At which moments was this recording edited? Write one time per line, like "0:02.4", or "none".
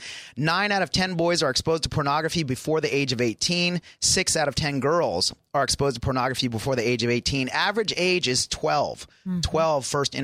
none